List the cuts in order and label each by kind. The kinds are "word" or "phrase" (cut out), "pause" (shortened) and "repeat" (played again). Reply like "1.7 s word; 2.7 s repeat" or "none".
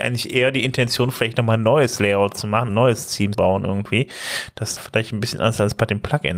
2.7 s word; 3.3 s word; 4.8 s word